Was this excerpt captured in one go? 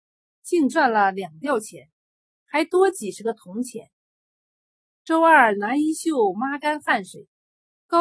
yes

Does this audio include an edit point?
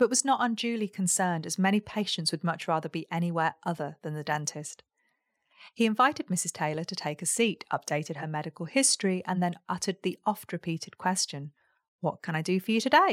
no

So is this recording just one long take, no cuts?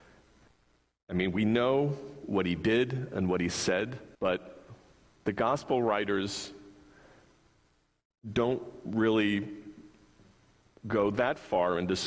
no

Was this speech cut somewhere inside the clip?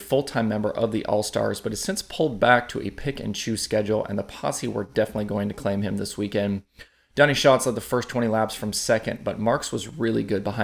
no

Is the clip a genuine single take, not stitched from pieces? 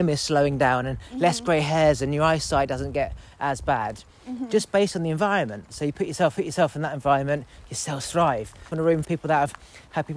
no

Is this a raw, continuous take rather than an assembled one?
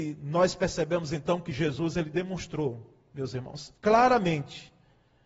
no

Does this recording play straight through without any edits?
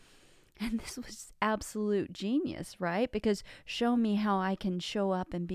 yes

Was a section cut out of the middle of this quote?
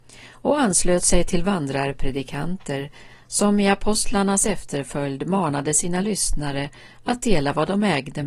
no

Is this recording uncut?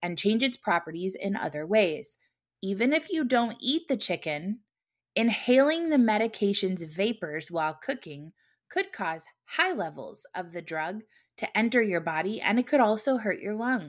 yes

